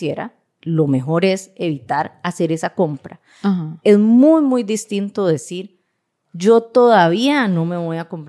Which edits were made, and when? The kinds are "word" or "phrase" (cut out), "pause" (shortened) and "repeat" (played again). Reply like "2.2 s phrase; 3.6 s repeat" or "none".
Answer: none